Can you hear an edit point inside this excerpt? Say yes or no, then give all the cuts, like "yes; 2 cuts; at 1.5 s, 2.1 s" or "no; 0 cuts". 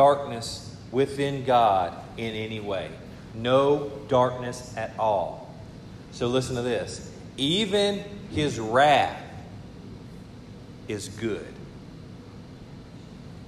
no; 0 cuts